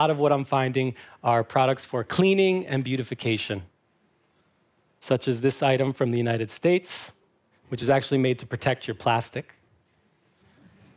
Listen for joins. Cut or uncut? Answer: uncut